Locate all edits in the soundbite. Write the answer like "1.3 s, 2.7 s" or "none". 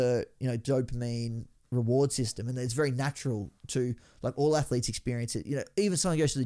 none